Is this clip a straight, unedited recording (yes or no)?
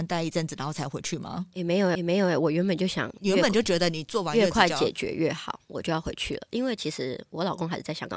no